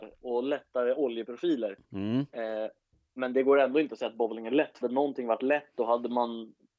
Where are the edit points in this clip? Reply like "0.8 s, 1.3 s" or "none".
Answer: 1.8 s, 4.8 s